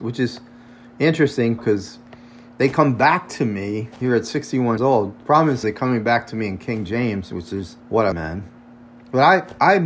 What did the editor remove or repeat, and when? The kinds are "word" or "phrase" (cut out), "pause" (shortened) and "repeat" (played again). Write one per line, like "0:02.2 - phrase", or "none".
0:01.6 - word
0:04.8 - word
0:05.6 - word
0:07.8 - pause
0:08.1 - phrase